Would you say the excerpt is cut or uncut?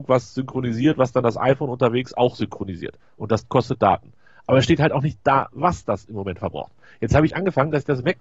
uncut